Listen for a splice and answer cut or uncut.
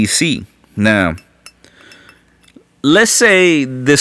uncut